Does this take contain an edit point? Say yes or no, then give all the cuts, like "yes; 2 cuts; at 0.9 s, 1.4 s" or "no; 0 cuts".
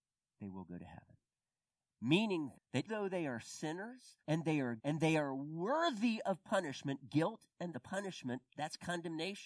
yes; 5 cuts; at 2.5 s, 2.9 s, 4.2 s, 4.8 s, 7.7 s